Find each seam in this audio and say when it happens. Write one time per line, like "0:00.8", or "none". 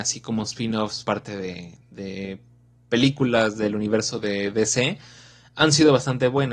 0:01.0